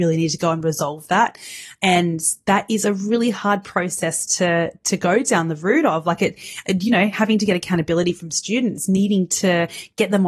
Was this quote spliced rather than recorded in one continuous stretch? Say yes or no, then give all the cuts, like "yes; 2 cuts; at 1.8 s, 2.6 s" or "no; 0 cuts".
no; 0 cuts